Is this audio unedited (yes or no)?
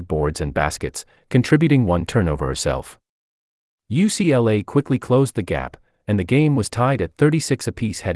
yes